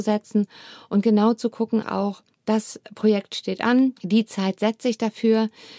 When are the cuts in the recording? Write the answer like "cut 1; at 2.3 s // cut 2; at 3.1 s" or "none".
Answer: cut 1; at 1.8 s // cut 2; at 2.3 s // cut 3; at 4.0 s